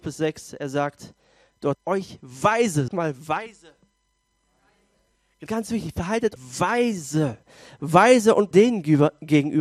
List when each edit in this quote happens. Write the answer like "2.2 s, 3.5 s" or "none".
1.7 s, 2.9 s, 5.5 s, 6.4 s, 8.5 s